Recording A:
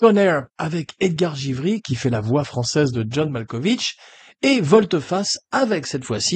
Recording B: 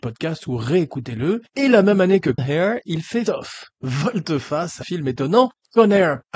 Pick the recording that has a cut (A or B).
B